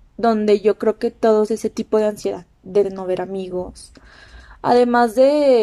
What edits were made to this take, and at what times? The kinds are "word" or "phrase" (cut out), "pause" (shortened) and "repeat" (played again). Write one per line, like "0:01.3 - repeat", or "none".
0:01.5 - phrase
0:02.8 - phrase